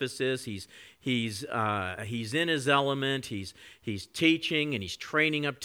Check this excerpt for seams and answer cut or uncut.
cut